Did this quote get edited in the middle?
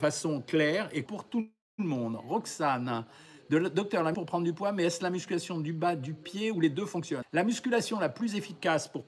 yes; 3 cuts; at 1.1 s, 4.1 s, 7.2 s

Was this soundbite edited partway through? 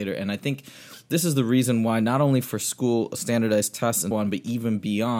yes; 1 cut; at 4.1 s

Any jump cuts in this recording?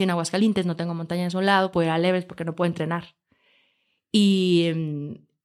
yes; 1 cut; at 1.7 s

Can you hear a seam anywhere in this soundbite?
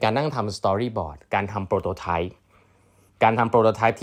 no; 0 cuts

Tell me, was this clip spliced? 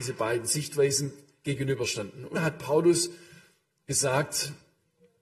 yes; 1 cut; at 2.3 s

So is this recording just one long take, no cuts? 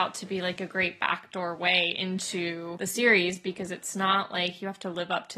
yes; 0 cuts

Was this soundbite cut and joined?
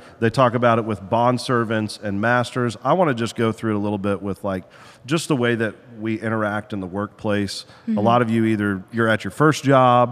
no; 0 cuts

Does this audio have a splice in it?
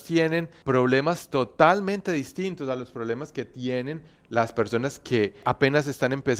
no; 0 cuts

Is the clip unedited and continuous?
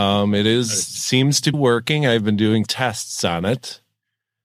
no; 2 cuts; at 1.5 s, 2.7 s

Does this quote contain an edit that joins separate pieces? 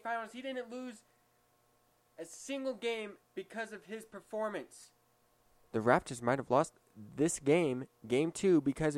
yes; 1 cut; at 3.2 s

